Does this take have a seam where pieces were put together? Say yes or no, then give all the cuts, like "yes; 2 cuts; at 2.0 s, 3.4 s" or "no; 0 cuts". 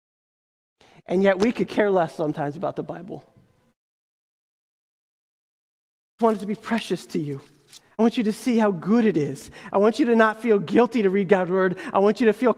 yes; 1 cut; at 6.2 s